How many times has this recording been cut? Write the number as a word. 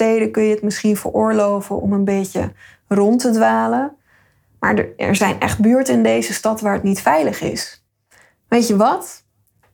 zero